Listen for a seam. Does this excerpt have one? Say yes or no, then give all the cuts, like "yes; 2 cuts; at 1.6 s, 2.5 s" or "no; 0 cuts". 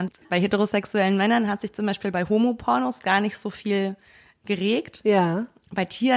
no; 0 cuts